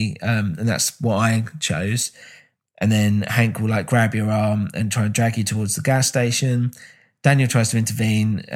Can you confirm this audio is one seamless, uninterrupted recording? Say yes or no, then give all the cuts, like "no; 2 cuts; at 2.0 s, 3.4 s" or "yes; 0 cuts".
yes; 0 cuts